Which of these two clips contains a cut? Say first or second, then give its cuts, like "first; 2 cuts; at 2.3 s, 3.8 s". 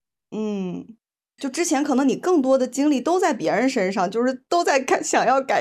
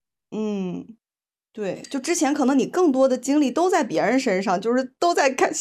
first; 1 cut; at 1.4 s